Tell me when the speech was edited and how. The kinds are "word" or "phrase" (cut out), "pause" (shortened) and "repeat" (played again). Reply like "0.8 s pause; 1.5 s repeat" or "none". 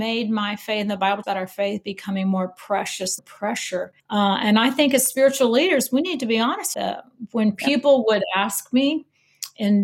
1.2 s word; 3.2 s phrase; 4.0 s pause; 6.7 s word

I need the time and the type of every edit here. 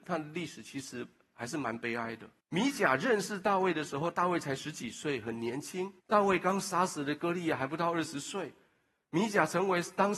2.4 s pause; 6.0 s pause

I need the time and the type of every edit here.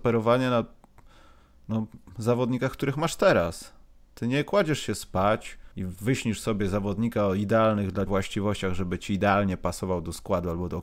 5.7 s pause; 8.1 s word

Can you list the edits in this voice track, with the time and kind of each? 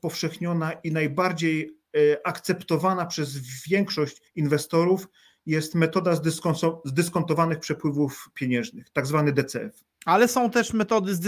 4.3 s pause; 9.9 s pause

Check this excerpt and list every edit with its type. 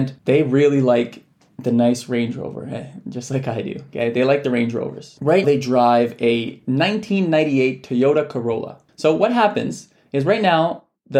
5.4 s word

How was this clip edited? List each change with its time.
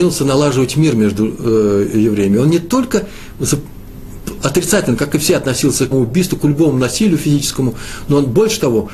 5.9 s word

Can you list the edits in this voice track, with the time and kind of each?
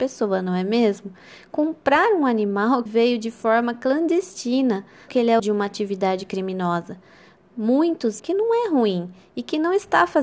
2.9 s word; 5.1 s word; 5.4 s word; 8.2 s word

